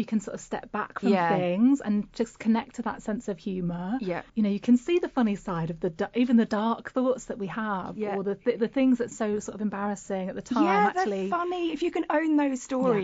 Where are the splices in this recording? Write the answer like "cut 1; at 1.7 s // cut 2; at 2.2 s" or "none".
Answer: cut 1; at 4.3 s // cut 2; at 9.1 s